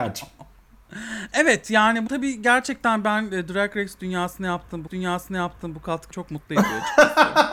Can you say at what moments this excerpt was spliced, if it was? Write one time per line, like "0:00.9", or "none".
0:02.1
0:04.9
0:06.1